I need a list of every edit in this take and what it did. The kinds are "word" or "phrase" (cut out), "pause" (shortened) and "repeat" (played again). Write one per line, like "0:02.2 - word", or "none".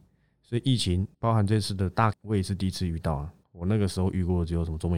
0:01.1 - pause
0:02.1 - word
0:03.4 - pause